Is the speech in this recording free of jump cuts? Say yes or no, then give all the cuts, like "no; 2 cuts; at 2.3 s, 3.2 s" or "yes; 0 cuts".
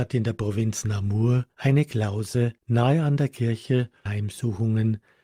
no; 3 cuts; at 1.5 s, 2.6 s, 4.1 s